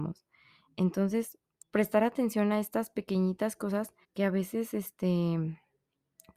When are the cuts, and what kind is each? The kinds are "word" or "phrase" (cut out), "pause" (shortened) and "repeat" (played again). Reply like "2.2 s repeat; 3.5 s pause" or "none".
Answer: 1.6 s pause; 4.0 s pause